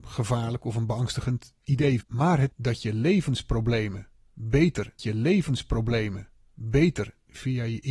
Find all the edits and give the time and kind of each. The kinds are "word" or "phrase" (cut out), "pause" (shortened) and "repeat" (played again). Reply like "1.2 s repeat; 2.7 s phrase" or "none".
2.0 s word; 2.5 s word; 5.0 s repeat